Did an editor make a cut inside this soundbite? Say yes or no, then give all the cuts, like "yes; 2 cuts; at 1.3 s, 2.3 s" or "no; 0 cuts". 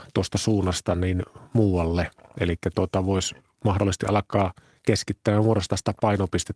no; 0 cuts